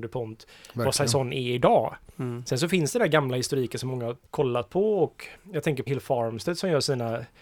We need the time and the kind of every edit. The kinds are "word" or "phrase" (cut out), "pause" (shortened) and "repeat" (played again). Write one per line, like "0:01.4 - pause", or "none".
0:04.3 - pause
0:05.9 - word

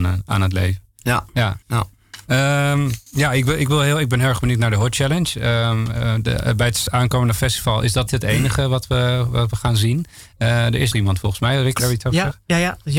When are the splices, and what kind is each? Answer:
0:01.6 - pause
0:03.1 - pause
0:06.9 - word
0:08.1 - word
0:10.9 - word
0:11.8 - word

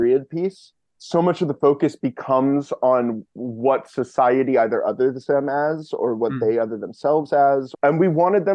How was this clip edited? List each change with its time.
0:03.3 - pause

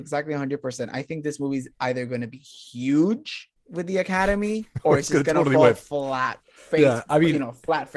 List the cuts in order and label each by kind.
0:03.5 - pause
0:06.4 - pause

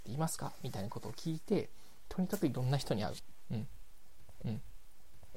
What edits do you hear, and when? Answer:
0:04.4 - repeat

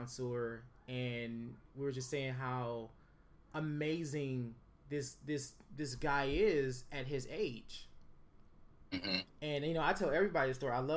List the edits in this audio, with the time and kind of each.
none

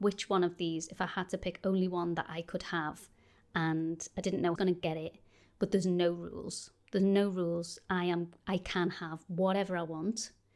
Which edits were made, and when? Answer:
0:04.6 - phrase

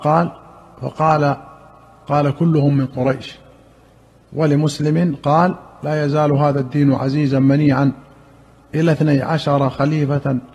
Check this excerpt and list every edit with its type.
none

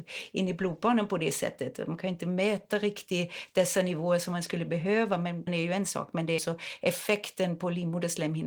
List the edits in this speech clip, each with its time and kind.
0:05.5 - word
0:06.4 - word

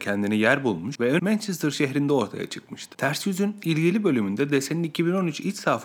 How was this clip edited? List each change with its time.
0:01.2 - word

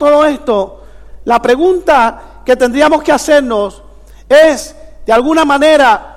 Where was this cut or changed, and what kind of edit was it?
none

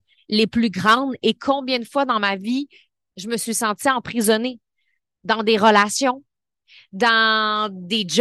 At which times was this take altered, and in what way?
none

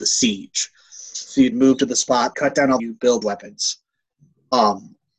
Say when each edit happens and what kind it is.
0:01.5 - phrase
0:02.3 - phrase
0:02.8 - phrase
0:03.2 - word

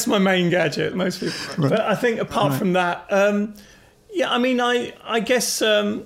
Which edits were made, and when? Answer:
0:00.9 - word

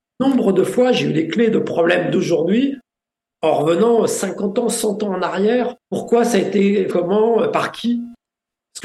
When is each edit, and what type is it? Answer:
0:05.8 - pause
0:06.9 - word

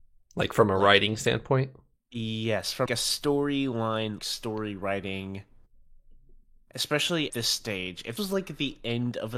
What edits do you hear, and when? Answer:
0:02.9 - word
0:04.2 - word
0:07.3 - word
0:08.2 - word

